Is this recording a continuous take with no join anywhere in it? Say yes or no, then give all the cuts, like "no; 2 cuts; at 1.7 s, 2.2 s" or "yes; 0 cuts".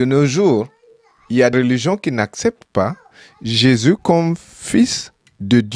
no; 1 cut; at 1.5 s